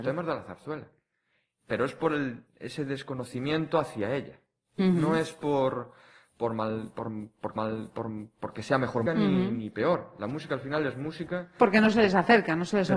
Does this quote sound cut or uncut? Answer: cut